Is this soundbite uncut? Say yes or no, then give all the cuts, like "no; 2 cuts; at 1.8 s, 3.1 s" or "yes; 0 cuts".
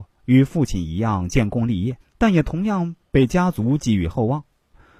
no; 1 cut; at 2.0 s